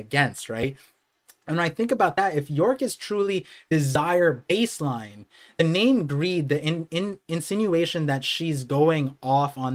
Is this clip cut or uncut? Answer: uncut